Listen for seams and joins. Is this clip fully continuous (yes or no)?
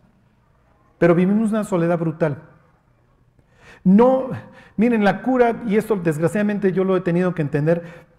yes